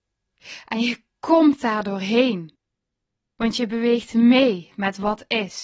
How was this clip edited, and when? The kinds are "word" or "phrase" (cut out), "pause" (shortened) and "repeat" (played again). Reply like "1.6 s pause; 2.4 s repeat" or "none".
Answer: none